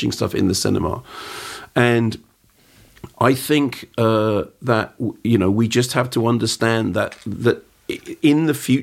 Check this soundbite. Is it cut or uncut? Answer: uncut